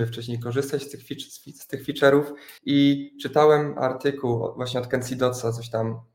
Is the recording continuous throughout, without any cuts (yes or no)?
no